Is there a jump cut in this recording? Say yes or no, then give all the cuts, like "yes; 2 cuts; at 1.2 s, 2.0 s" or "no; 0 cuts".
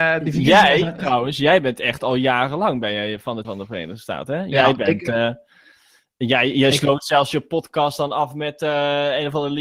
yes; 1 cut; at 3.4 s